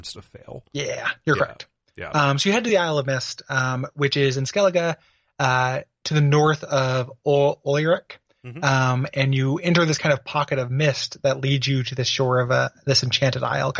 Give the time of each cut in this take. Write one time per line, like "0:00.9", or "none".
none